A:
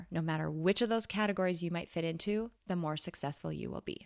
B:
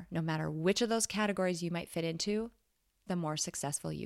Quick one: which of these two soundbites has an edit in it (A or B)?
A